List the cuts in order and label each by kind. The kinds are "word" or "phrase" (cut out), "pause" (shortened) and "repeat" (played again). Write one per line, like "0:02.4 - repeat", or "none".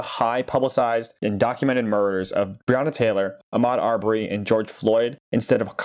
0:03.4 - pause